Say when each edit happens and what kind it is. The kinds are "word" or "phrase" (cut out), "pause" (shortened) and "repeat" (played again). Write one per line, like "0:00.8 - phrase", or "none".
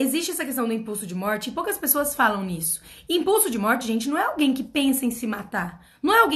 none